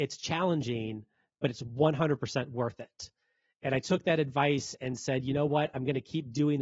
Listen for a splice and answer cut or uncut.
uncut